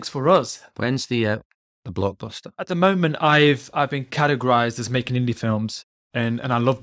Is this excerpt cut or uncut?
uncut